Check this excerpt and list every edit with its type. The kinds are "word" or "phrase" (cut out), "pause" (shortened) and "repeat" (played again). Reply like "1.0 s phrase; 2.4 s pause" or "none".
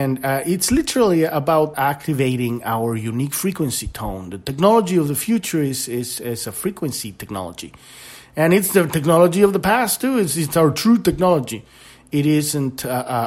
1.7 s word